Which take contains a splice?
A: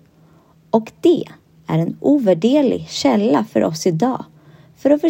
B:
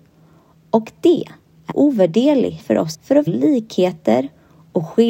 B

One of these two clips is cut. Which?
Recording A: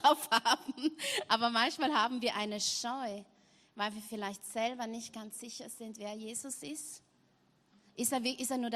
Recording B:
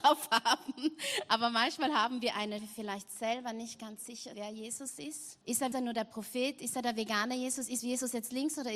B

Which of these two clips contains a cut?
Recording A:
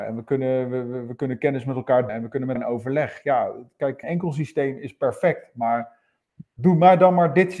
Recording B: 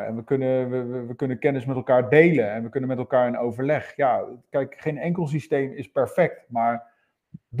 A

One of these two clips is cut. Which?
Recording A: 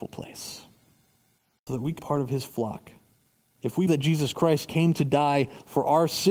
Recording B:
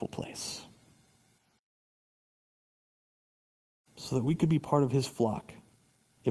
A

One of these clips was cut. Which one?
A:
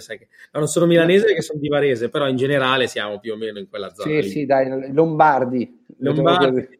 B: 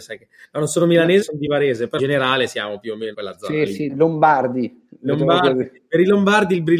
B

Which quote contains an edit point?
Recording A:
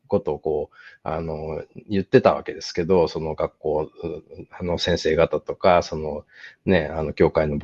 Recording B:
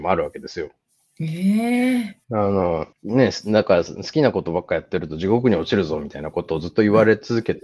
B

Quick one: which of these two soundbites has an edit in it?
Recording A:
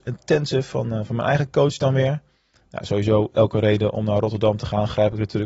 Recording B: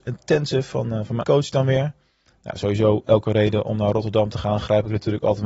B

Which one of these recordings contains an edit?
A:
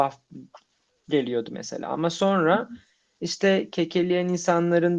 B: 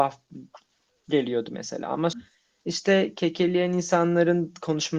B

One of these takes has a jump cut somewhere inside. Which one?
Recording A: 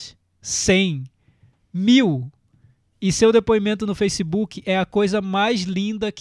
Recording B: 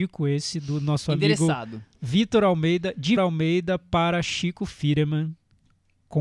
B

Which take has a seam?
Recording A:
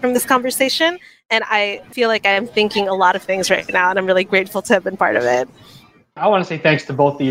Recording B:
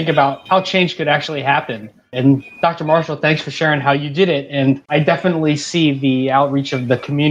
B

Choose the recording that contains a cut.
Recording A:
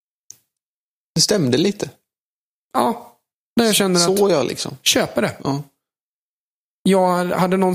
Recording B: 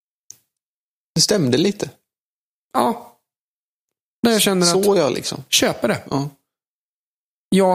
A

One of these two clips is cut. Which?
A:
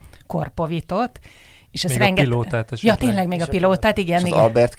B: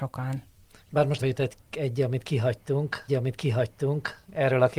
B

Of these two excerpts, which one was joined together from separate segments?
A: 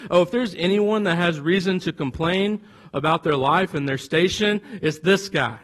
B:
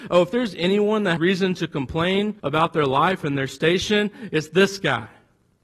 B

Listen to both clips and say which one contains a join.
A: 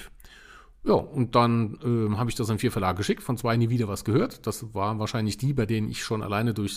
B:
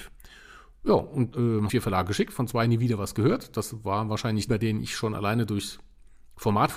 B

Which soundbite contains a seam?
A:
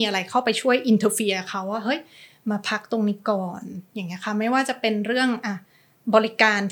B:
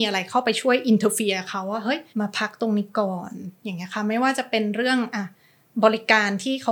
B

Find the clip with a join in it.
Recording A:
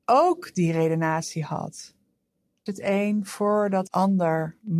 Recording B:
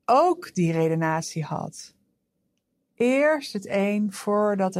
A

